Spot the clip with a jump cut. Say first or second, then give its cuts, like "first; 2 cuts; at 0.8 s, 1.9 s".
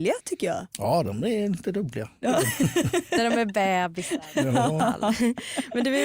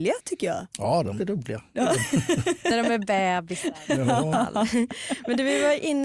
second; 1 cut; at 1.2 s